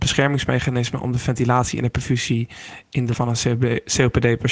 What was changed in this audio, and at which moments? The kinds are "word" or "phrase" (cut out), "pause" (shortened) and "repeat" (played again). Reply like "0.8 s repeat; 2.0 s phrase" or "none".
3.1 s word